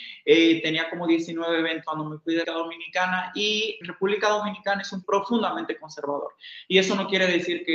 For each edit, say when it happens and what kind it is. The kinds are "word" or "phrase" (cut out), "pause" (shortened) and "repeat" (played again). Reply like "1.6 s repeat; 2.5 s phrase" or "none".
1.8 s word; 2.4 s word; 3.8 s word; 5.0 s word